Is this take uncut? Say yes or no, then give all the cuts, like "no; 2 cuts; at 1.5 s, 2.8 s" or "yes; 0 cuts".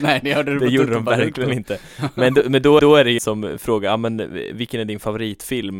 no; 2 cuts; at 2.8 s, 3.2 s